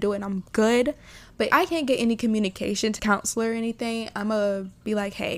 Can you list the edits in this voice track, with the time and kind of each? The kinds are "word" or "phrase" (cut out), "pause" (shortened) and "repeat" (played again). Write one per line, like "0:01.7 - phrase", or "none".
0:01.5 - word
0:03.0 - word